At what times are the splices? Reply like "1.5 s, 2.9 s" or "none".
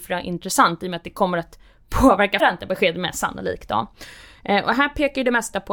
2.4 s